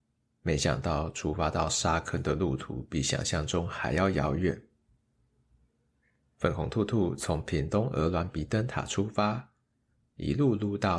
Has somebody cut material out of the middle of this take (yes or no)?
no